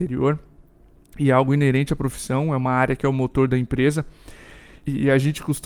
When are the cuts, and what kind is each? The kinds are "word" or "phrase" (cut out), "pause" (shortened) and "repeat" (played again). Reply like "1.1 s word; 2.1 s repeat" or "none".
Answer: none